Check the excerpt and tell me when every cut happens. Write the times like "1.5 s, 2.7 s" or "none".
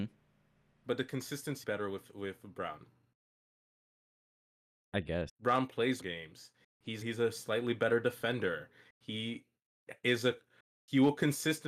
1.6 s, 5.3 s, 6.0 s, 7.0 s